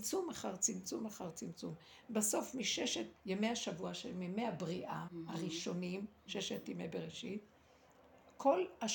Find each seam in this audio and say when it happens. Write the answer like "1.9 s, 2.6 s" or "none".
3.2 s, 5.1 s

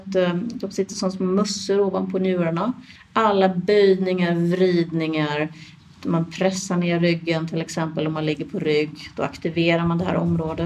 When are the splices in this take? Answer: none

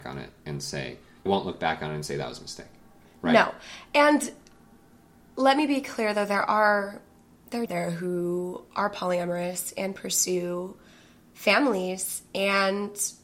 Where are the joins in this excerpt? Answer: 1.3 s, 7.7 s

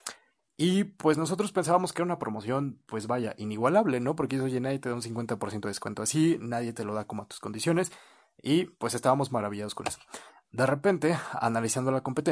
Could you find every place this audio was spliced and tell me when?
none

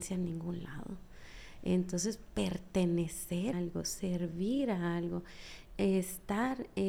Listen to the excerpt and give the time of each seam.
3.5 s

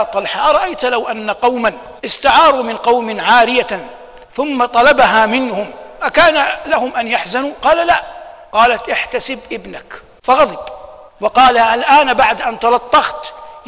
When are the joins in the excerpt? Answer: 2.0 s, 4.2 s, 8.4 s, 11.1 s

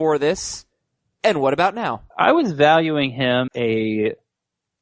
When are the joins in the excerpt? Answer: 2.1 s, 3.5 s

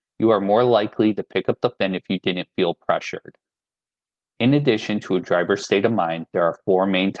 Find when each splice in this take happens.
1.8 s

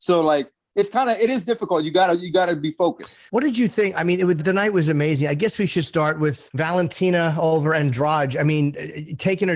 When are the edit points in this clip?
3.3 s, 4.4 s, 6.5 s

